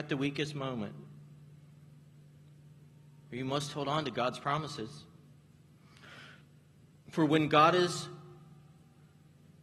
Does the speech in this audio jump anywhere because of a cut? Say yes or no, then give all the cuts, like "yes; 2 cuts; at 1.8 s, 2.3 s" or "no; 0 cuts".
no; 0 cuts